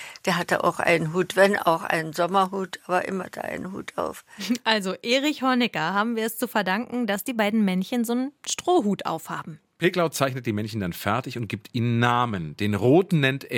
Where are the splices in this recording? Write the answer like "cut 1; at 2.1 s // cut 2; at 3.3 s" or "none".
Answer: cut 1; at 3.2 s

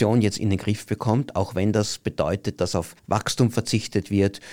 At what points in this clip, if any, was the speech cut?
cut 1; at 3.0 s

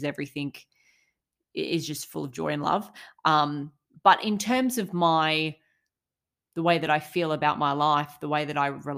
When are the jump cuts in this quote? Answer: none

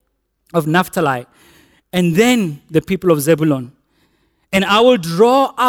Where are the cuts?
none

